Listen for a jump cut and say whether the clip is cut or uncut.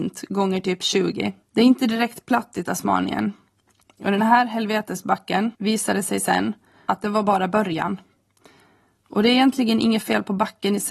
cut